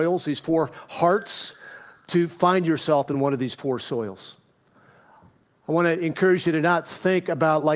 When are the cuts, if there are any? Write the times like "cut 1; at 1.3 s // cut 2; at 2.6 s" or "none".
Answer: none